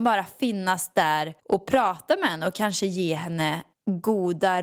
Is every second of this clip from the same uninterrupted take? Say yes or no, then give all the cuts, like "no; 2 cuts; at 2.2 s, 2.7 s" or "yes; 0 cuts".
no; 2 cuts; at 1.4 s, 3.7 s